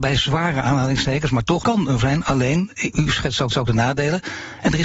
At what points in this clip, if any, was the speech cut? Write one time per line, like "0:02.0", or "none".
0:01.6
0:02.0
0:03.5